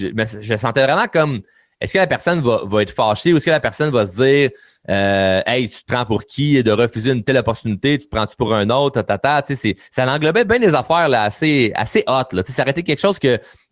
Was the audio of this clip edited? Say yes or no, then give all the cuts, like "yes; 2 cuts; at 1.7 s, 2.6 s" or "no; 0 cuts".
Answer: no; 0 cuts